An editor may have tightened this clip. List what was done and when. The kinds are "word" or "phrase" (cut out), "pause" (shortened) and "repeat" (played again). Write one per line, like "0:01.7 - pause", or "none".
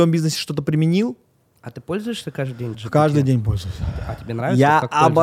0:02.7 - word